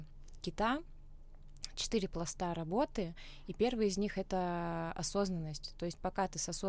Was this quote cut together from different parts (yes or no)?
no